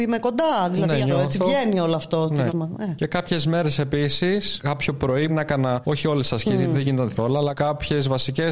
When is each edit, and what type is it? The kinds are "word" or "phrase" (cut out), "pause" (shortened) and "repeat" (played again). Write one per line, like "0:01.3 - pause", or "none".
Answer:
0:02.5 - word
0:05.3 - word
0:07.2 - word